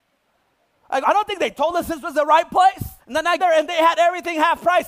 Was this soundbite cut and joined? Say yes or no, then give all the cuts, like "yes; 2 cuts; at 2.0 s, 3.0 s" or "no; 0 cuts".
yes; 3 cuts; at 1.0 s, 3.0 s, 3.4 s